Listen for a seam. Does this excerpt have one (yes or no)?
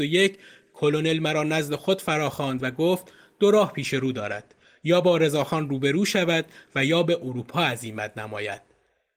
no